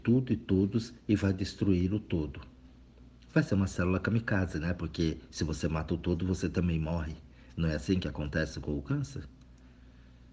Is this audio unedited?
yes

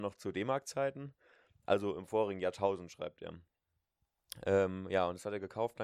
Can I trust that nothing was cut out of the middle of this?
yes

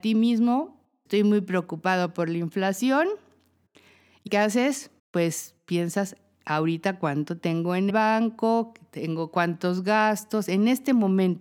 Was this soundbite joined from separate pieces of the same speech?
yes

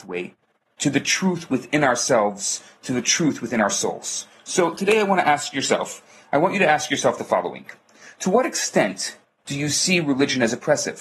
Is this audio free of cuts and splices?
yes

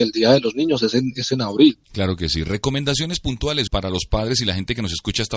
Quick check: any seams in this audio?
yes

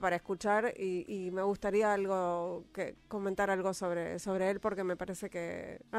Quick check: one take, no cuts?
yes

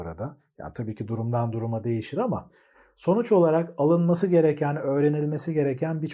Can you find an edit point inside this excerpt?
no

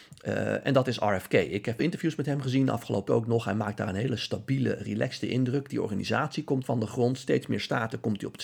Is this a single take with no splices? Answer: no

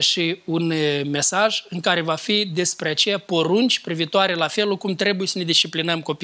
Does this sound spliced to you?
no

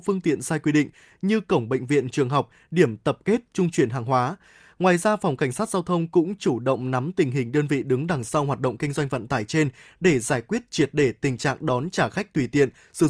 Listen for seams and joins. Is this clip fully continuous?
yes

